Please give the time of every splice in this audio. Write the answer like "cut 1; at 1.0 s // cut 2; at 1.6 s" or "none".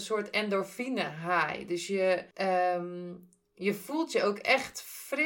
cut 1; at 2.3 s